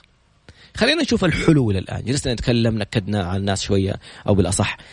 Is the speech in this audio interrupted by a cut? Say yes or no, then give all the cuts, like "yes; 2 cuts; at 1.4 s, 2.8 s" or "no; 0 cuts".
no; 0 cuts